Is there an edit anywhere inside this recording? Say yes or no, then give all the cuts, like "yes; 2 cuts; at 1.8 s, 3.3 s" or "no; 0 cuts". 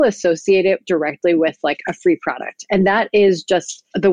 no; 0 cuts